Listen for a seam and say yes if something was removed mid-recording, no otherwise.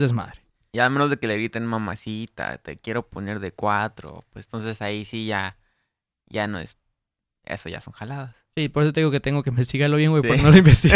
no